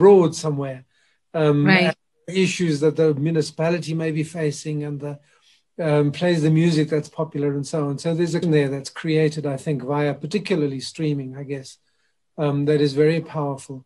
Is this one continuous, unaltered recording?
no; 1 cut; at 8.4 s

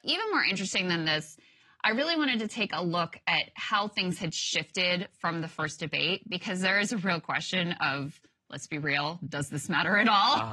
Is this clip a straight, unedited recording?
yes; 0 cuts

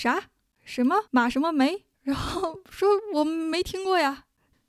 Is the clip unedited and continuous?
no; 2 cuts; at 1.1 s, 1.9 s

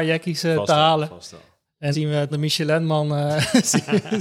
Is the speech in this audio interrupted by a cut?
yes; 2 cuts; at 1.9 s, 2.3 s

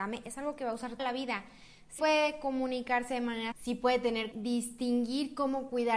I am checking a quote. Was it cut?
yes; 4 cuts; at 1.0 s, 2.0 s, 3.5 s, 4.3 s

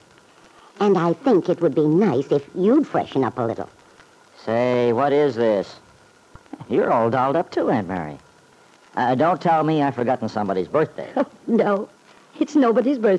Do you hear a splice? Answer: no; 0 cuts

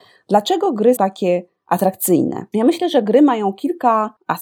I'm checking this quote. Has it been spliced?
yes; 1 cut; at 1.0 s

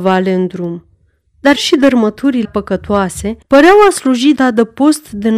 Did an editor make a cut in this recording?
yes; 4 cuts; at 1.6 s, 2.4 s, 3.4 s, 4.4 s

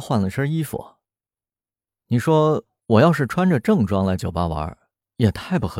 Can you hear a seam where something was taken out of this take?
no; 0 cuts

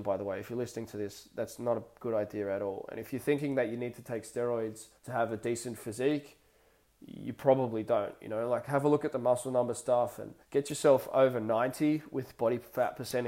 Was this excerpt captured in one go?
no; 2 cuts; at 5.0 s, 10.4 s

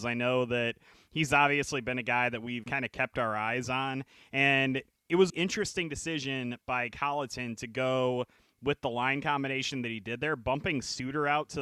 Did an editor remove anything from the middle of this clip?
yes; 2 cuts; at 2.6 s, 5.3 s

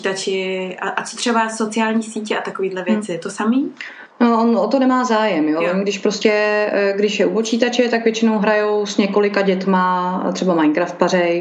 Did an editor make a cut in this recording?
yes; 1 cut; at 4.1 s

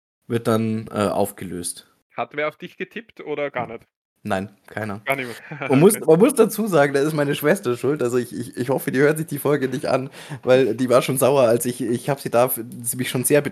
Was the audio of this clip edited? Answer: no; 0 cuts

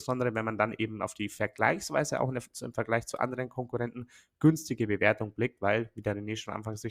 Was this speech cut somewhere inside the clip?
no; 0 cuts

